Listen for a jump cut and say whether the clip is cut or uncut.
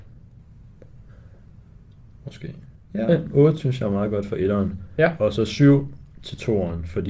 uncut